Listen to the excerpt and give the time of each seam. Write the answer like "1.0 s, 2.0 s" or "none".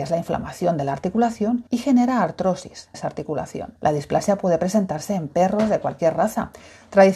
1.7 s, 2.9 s, 3.8 s